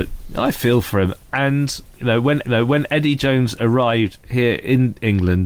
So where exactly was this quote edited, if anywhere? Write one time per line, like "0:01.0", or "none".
0:02.0
0:02.4

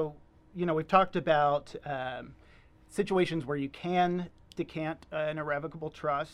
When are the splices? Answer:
none

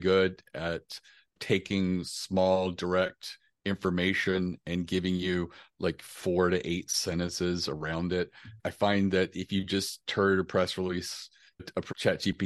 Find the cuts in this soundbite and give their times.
none

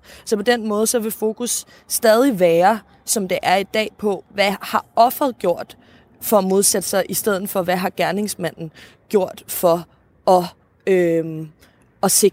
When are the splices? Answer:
none

